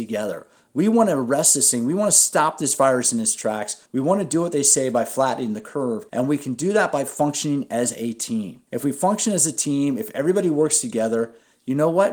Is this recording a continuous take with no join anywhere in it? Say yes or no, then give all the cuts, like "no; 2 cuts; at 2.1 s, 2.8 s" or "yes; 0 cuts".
no; 3 cuts; at 3.8 s, 6.1 s, 8.7 s